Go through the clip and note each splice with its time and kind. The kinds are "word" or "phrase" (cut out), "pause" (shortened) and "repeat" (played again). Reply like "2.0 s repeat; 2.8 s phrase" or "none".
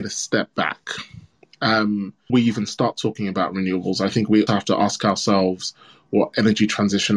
2.3 s word; 4.5 s word